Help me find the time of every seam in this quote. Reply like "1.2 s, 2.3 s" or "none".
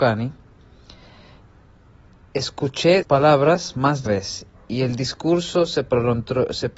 3.0 s, 4.1 s